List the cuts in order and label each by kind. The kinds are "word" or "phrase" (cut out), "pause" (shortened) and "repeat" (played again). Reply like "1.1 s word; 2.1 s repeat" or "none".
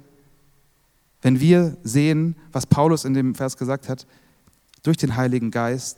none